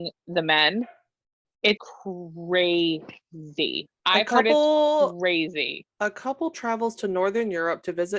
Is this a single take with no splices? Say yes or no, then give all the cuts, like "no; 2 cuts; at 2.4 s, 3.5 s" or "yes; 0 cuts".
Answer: no; 1 cut; at 1.8 s